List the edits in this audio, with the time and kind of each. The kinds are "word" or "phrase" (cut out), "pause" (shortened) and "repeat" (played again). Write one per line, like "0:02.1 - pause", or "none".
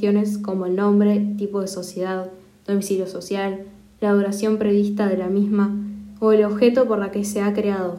none